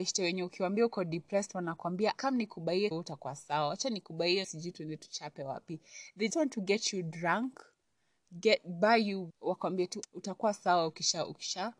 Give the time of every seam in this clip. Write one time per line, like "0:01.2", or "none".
0:02.1
0:02.9
0:04.4
0:06.3
0:09.3
0:10.0